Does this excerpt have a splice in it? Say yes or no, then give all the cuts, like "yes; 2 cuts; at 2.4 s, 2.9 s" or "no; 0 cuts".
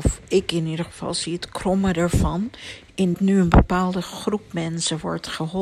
yes; 1 cut; at 3.1 s